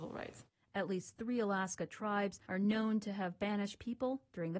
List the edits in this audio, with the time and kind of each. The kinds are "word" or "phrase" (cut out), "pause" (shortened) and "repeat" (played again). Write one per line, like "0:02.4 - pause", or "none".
0:02.4 - pause

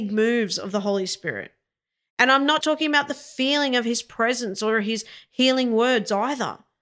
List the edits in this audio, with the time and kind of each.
0:02.6 - word

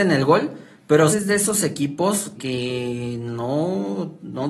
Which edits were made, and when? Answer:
0:01.1 - word
0:02.3 - word

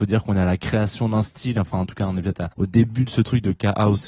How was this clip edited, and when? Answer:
0:02.5 - pause

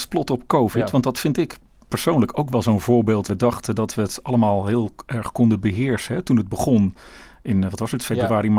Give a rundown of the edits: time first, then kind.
0:03.3 - word

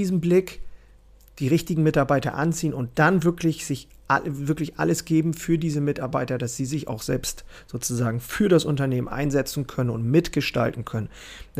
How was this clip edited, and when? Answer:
none

